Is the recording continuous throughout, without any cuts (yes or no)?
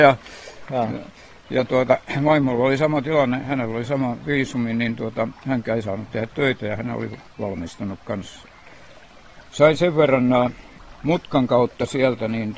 yes